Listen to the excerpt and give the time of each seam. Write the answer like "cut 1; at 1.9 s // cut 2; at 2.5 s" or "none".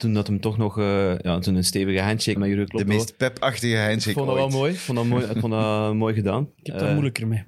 cut 1; at 2.4 s